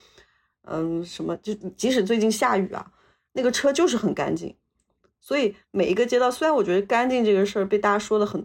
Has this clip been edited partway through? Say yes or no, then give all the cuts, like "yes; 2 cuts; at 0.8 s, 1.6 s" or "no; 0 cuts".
no; 0 cuts